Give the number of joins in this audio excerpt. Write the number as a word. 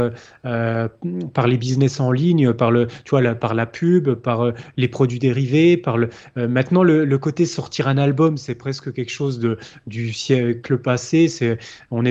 zero